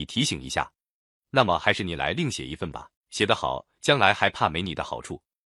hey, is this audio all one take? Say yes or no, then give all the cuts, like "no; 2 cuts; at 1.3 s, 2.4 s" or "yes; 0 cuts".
no; 1 cut; at 3.0 s